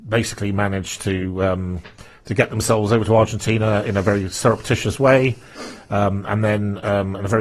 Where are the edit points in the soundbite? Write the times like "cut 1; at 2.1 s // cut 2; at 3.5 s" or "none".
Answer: none